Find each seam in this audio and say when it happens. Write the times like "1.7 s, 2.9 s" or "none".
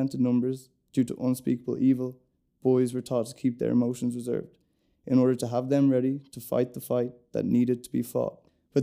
none